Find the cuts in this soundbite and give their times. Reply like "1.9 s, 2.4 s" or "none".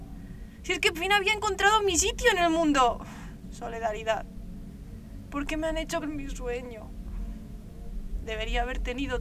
0.9 s, 6.0 s